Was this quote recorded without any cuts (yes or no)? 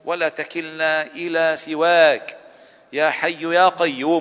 yes